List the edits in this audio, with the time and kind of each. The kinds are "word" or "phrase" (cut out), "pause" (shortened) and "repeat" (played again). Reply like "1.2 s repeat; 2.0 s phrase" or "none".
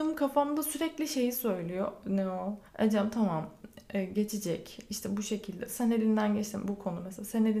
2.7 s pause